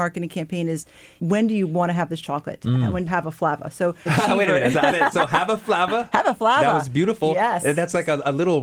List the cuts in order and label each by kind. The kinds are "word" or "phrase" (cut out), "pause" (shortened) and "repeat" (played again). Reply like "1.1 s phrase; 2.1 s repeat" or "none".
1.2 s word; 3.1 s word; 4.1 s word; 4.9 s word